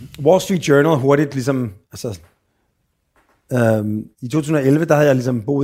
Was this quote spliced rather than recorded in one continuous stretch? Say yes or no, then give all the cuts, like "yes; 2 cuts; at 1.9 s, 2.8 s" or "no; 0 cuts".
yes; 2 cuts; at 1.8 s, 4.1 s